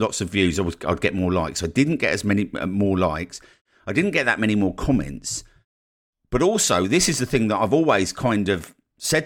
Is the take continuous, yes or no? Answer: yes